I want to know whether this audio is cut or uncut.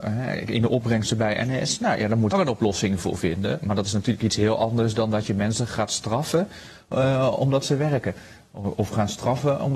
cut